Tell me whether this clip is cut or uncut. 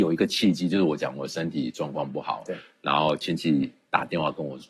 uncut